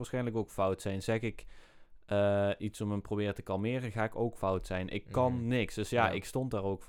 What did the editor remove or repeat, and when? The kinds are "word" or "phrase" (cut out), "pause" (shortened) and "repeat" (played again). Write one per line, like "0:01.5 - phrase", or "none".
none